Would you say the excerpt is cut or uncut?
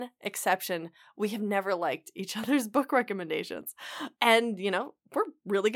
uncut